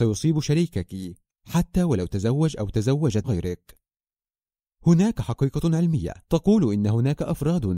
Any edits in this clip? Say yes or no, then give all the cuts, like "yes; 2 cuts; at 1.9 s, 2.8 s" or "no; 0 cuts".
yes; 2 cuts; at 3.2 s, 6.2 s